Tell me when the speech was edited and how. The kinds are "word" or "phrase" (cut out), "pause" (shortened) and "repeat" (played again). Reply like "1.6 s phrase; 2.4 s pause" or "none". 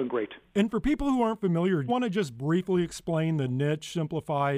1.9 s word